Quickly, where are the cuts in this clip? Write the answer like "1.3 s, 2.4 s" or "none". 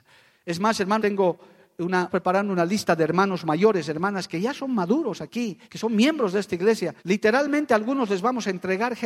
1.0 s, 2.1 s, 5.6 s, 7.0 s